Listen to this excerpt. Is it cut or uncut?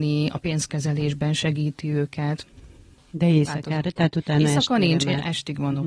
uncut